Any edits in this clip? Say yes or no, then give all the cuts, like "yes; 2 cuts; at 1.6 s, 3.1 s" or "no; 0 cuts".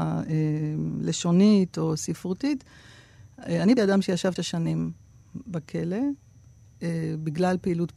yes; 2 cuts; at 3.8 s, 4.4 s